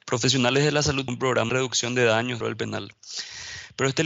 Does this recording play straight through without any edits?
no; 3 cuts; at 1.1 s, 1.5 s, 2.4 s

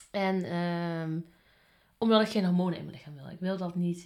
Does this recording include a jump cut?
no; 0 cuts

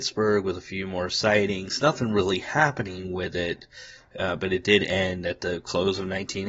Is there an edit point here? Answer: no; 0 cuts

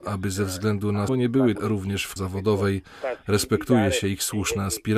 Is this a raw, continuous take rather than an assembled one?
no; 3 cuts; at 1.1 s, 1.5 s, 2.2 s

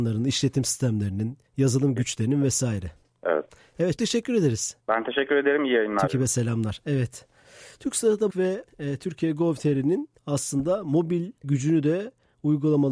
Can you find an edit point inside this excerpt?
yes; 9 cuts; at 1.5 s, 3.0 s, 4.0 s, 4.8 s, 6.1 s, 8.3 s, 8.7 s, 10.2 s, 11.4 s

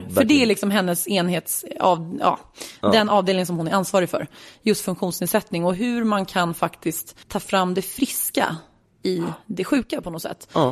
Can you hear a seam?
yes; 1 cut; at 7.2 s

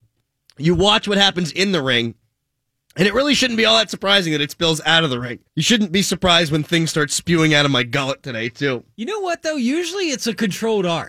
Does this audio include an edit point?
yes; 1 cut; at 5.5 s

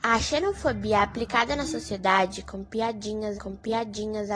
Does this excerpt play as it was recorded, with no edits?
no; 1 cut; at 3.4 s

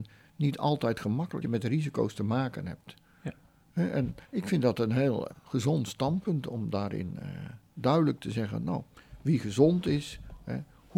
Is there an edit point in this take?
yes; 3 cuts; at 1.4 s, 4.2 s, 5.3 s

